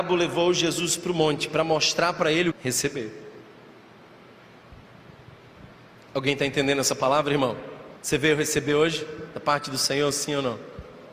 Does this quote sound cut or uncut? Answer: cut